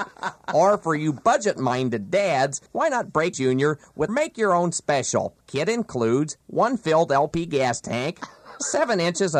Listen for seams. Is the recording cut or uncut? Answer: cut